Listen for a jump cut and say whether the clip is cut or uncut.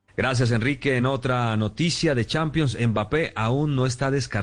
uncut